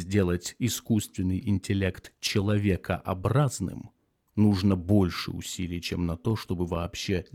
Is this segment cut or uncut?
uncut